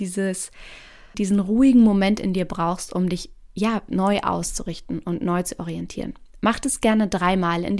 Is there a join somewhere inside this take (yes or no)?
no